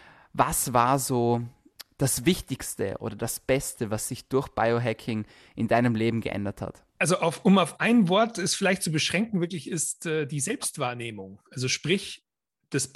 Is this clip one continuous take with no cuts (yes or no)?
no